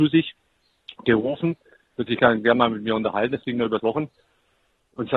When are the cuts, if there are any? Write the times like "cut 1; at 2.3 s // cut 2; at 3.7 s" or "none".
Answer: cut 1; at 3.8 s